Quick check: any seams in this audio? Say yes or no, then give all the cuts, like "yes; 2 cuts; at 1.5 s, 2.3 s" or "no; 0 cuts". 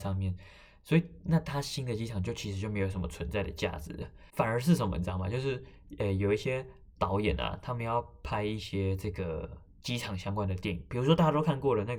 yes; 1 cut; at 4.3 s